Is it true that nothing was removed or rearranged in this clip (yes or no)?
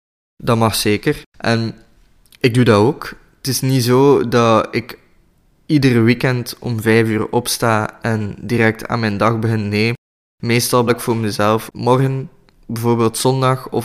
no